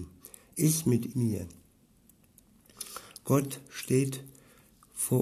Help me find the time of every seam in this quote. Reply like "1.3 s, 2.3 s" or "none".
1.1 s